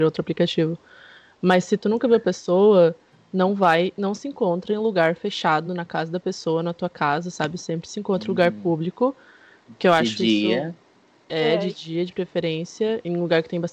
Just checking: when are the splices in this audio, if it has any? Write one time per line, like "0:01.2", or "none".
none